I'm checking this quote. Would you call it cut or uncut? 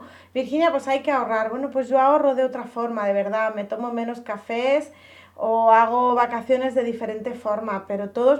uncut